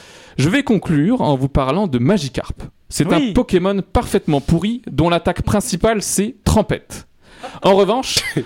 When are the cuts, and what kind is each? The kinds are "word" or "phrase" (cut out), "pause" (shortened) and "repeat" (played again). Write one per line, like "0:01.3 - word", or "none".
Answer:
0:06.4 - word